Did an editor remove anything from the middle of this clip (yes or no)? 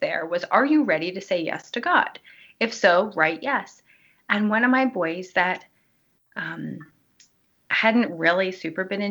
no